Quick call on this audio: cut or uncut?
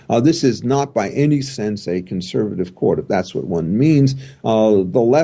uncut